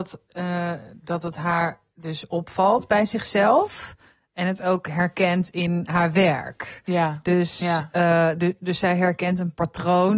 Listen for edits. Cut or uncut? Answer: uncut